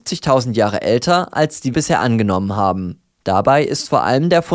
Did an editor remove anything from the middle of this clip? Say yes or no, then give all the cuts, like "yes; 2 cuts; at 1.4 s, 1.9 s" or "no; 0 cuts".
yes; 1 cut; at 1.7 s